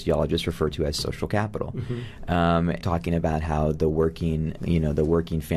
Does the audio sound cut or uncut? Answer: cut